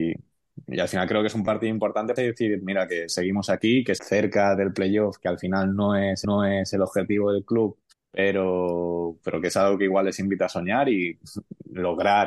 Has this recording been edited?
yes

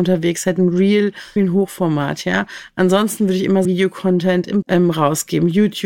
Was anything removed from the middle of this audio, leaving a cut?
yes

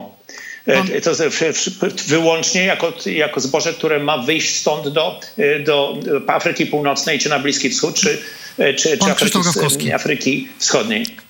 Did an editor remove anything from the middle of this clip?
no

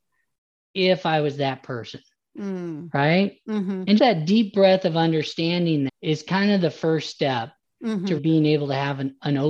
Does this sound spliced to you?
yes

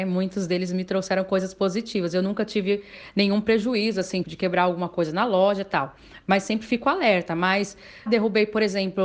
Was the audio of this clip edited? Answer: yes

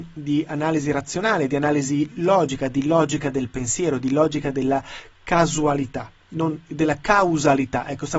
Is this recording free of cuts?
no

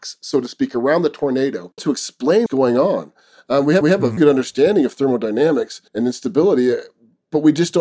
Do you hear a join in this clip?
yes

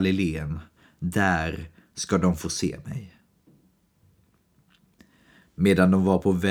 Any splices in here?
no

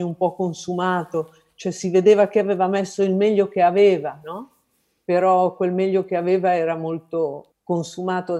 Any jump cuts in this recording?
no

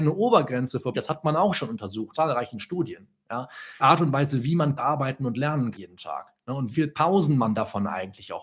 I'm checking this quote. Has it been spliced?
yes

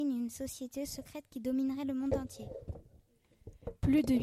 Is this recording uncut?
yes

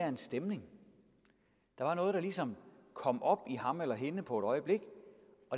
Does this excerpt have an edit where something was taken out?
no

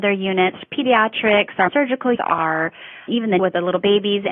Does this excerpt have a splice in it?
yes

